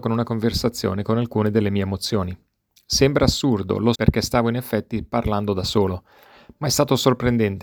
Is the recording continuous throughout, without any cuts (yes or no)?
no